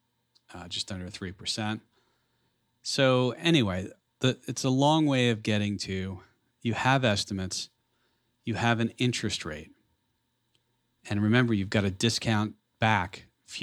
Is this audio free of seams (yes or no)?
yes